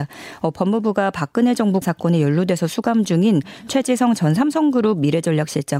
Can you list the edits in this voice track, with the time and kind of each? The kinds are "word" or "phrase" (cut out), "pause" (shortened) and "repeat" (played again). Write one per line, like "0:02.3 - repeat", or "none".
0:01.8 - word

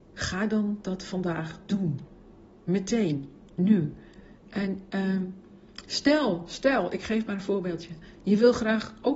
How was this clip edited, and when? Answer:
none

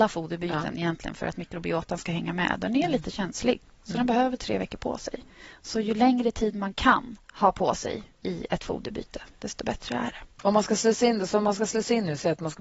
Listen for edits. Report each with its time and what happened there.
0:07.2 - pause
0:08.1 - pause
0:10.3 - pause

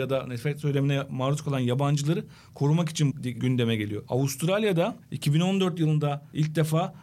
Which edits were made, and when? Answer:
0:03.1 - word

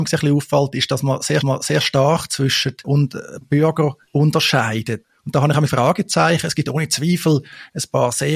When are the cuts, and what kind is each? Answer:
0:01.4 - repeat
0:02.8 - word
0:03.4 - word
0:05.7 - word

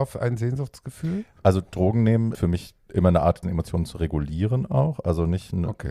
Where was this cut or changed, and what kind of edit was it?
0:02.3 - word
0:03.4 - word

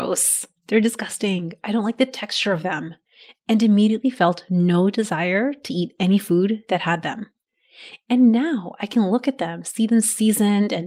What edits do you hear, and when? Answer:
none

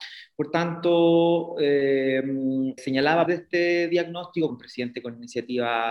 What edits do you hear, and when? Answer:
0:02.8 - word
0:03.3 - word
0:04.5 - word

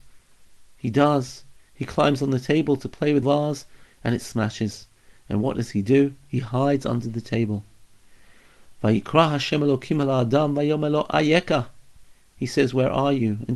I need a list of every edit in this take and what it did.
0:03.2 - phrase

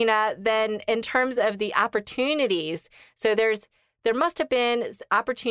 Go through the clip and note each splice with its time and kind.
none

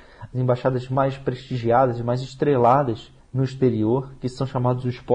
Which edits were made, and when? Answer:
0:03.2 - pause

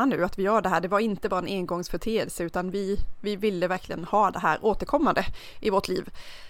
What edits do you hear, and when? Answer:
none

